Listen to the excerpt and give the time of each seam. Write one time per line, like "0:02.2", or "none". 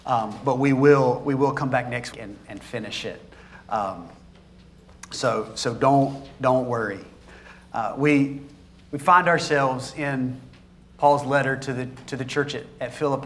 0:02.1